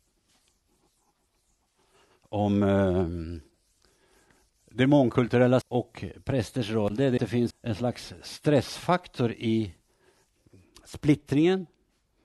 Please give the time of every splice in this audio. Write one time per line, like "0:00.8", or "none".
0:05.6
0:07.2
0:07.5